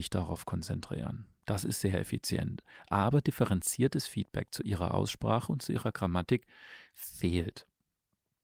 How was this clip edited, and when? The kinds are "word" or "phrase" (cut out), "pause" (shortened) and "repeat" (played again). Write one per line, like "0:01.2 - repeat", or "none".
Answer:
none